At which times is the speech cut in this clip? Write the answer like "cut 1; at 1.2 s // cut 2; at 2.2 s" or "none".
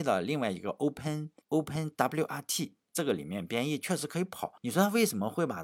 cut 1; at 1.4 s // cut 2; at 4.6 s

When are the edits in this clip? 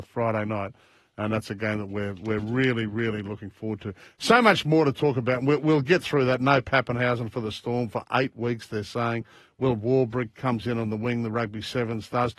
none

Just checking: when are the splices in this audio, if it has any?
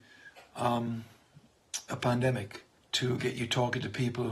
cut 1; at 2.8 s

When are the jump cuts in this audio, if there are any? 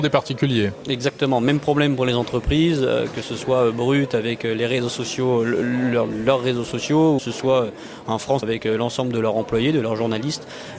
cut 1; at 7.2 s // cut 2; at 8.4 s

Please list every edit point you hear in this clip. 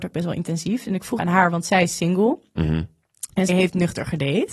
cut 1; at 1.2 s // cut 2; at 3.5 s

